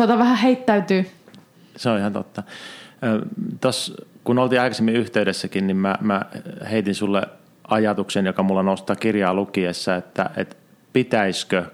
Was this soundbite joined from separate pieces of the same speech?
no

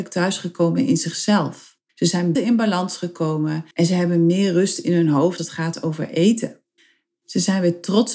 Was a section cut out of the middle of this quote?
yes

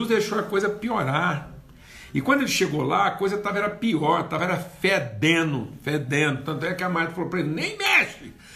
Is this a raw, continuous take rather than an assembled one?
yes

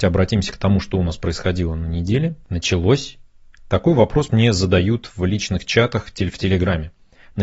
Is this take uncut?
yes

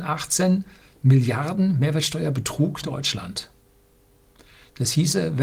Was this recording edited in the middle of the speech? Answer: yes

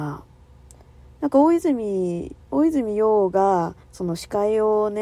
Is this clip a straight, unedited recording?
no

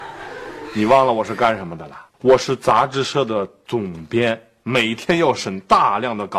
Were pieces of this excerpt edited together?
yes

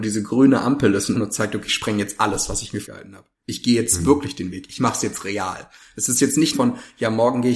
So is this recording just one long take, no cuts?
no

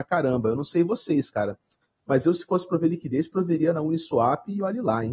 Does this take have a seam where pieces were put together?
no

